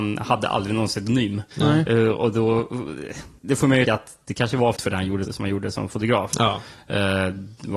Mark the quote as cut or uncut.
cut